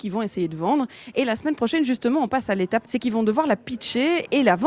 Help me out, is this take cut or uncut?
cut